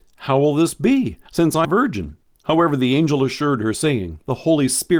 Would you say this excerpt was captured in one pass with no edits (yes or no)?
no